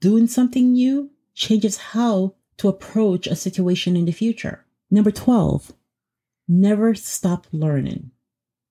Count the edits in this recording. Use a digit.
0